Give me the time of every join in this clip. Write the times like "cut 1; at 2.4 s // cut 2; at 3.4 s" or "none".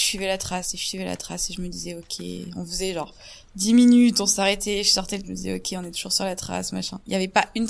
cut 1; at 5.2 s